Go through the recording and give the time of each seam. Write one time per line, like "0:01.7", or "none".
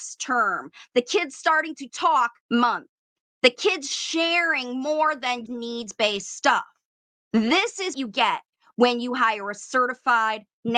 0:02.4
0:05.5
0:07.9